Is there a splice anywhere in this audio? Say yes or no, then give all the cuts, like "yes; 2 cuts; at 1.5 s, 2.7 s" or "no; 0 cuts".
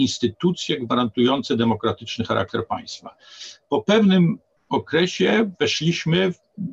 no; 0 cuts